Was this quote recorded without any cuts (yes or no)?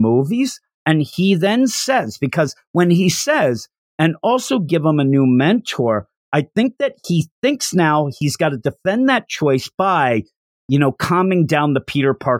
yes